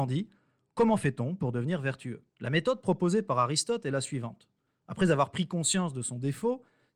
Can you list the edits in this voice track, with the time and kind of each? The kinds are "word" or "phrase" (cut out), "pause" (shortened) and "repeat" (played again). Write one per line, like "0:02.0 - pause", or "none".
0:02.3 - pause